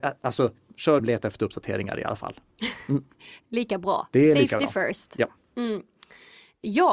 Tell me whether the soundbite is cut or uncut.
cut